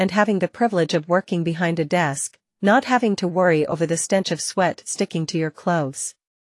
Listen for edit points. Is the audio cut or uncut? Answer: uncut